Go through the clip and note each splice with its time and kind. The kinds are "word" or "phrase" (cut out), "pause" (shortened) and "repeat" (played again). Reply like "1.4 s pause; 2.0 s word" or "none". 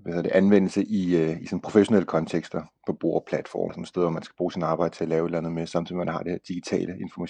3.7 s word